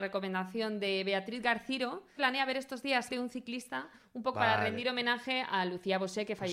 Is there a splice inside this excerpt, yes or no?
yes